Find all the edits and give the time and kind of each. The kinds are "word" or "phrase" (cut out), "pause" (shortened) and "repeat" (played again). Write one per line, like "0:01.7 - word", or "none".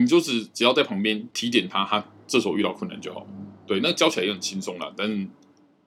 0:01.3 - pause